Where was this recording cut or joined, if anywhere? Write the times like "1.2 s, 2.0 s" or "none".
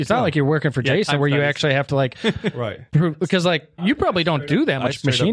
none